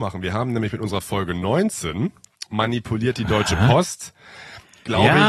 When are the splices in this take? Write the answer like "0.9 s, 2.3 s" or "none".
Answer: 2.5 s